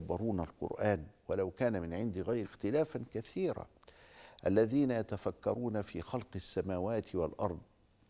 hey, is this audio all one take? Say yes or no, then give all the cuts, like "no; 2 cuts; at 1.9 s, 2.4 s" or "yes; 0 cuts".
no; 1 cut; at 2.4 s